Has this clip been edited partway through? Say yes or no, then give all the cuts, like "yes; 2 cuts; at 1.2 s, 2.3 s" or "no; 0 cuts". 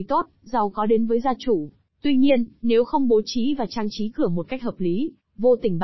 yes; 1 cut; at 1.9 s